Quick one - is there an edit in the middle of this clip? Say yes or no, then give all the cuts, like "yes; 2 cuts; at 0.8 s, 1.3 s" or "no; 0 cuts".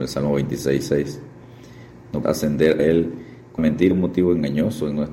yes; 4 cuts; at 2.2 s, 2.8 s, 3.6 s, 3.9 s